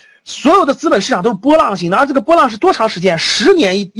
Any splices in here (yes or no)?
no